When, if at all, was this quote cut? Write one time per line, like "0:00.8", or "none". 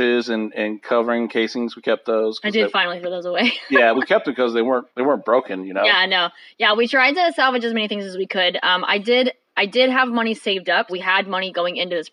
0:03.9
0:04.9
0:10.9